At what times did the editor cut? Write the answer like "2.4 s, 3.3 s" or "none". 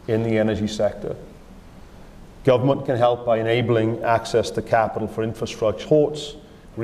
5.8 s